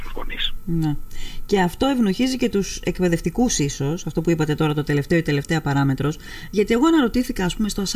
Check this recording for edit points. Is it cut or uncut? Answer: uncut